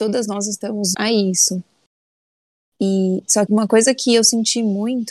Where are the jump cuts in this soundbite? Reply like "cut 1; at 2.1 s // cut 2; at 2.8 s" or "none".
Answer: cut 1; at 0.9 s // cut 2; at 3.5 s